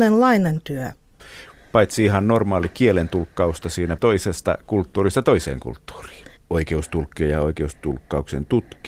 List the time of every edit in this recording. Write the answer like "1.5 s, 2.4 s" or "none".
4.0 s